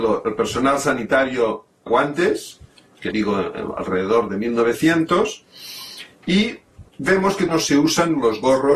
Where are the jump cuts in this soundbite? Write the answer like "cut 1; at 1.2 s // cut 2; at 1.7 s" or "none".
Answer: cut 1; at 1.9 s // cut 2; at 3.1 s // cut 3; at 6.9 s // cut 4; at 7.5 s